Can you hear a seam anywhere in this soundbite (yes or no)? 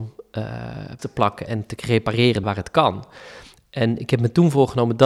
yes